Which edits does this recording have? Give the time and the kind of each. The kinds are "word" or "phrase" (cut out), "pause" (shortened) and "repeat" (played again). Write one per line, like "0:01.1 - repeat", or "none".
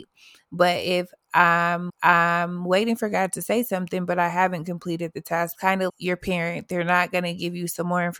0:01.9 - repeat
0:05.5 - phrase
0:05.9 - word